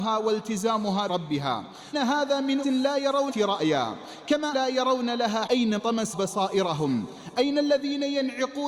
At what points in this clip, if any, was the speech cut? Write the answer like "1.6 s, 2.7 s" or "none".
1.1 s, 1.9 s, 2.6 s, 3.3 s, 4.5 s, 5.5 s, 5.8 s, 6.1 s